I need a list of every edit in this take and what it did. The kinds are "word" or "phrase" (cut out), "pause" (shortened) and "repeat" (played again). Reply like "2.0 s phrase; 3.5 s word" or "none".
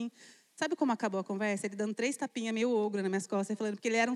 none